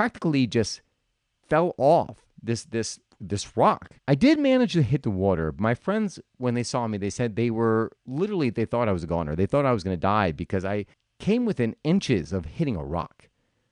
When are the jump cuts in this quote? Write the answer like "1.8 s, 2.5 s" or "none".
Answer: 4.0 s, 8.0 s, 10.9 s